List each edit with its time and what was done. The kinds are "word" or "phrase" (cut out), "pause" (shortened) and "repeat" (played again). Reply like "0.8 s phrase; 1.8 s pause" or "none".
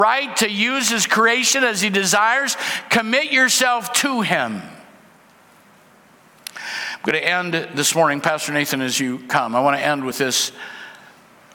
none